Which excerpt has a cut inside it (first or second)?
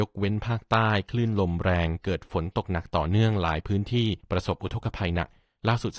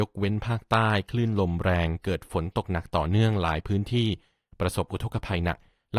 first